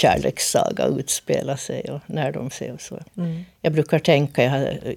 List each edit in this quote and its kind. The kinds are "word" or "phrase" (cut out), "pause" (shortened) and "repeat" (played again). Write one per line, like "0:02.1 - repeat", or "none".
0:02.5 - word
0:03.1 - pause